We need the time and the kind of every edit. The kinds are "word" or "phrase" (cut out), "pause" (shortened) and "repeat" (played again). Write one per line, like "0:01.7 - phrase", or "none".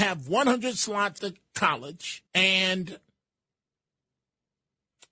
0:01.2 - word
0:02.3 - pause